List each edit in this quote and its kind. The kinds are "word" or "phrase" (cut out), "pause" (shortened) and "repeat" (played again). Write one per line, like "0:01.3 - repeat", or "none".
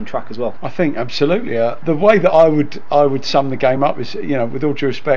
none

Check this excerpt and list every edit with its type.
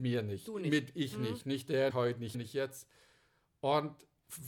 0:01.9 - word
0:02.3 - word

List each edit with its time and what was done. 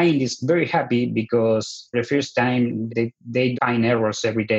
0:01.9 - word
0:02.9 - word
0:03.5 - word

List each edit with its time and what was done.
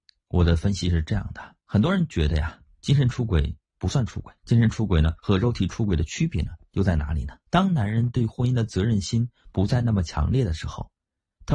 0:01.6 - pause
0:04.4 - pause
0:05.2 - pause
0:07.5 - pause

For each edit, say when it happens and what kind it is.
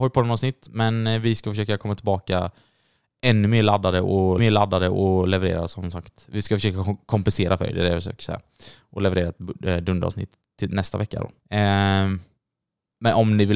0:04.4 - repeat
0:10.4 - word
0:11.4 - pause

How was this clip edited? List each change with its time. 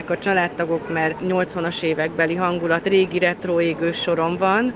0:02.8 - word

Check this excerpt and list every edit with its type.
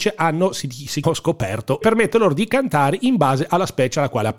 0:01.0 - word
0:01.8 - phrase

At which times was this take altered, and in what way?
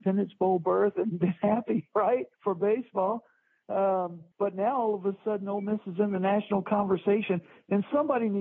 0:02.3 - pause
0:04.3 - pause

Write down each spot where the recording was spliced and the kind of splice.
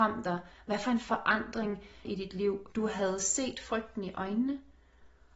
0:02.0 - word
0:02.7 - word

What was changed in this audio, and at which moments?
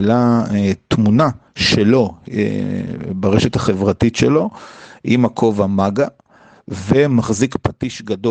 none

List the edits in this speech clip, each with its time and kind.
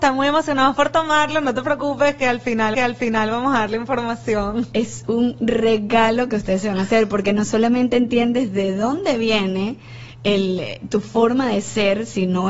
0:02.7 - repeat

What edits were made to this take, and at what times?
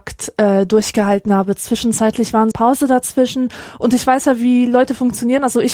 0:02.5 - phrase

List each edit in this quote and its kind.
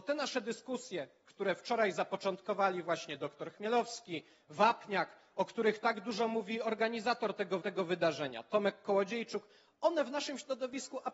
0:07.6 - repeat

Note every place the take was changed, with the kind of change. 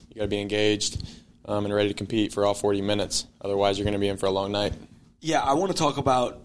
none

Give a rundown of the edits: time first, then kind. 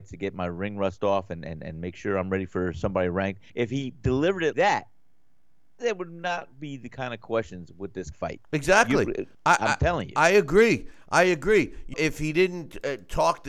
0:03.5 - pause
0:04.5 - word
0:08.1 - word
0:09.3 - pause
0:11.9 - word

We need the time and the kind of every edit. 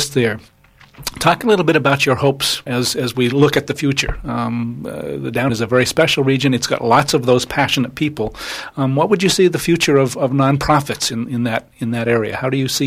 0:02.7 - word
0:05.5 - phrase

